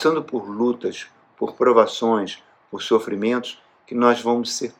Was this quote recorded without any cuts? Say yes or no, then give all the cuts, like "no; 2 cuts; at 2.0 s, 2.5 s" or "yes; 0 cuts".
yes; 0 cuts